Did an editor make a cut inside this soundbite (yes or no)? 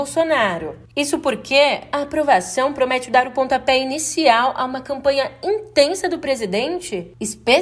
no